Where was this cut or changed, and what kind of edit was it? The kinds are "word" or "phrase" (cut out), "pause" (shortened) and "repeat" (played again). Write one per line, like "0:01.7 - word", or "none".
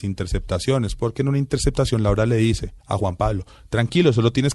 0:02.8 - pause